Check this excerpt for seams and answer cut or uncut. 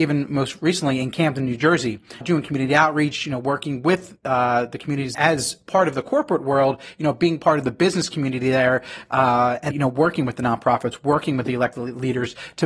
cut